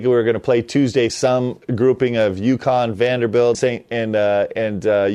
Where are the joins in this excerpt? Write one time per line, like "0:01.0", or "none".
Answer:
0:01.1
0:03.5